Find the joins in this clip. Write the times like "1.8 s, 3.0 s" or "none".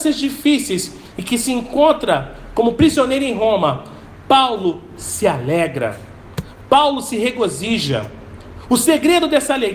none